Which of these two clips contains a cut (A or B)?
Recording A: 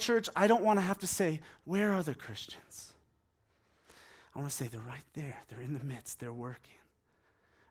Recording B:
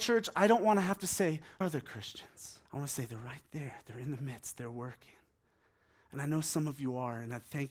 B